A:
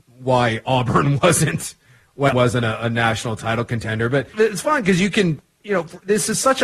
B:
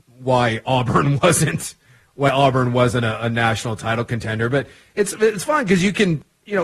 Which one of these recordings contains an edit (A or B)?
A